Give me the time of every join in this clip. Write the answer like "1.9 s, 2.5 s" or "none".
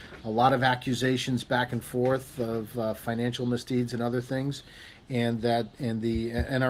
none